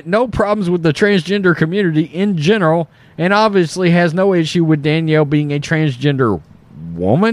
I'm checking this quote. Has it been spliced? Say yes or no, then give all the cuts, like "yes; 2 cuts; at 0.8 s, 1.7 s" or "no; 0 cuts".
no; 0 cuts